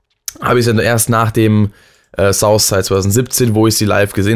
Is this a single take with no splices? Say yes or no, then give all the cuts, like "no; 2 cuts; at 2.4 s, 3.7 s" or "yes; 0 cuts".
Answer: yes; 0 cuts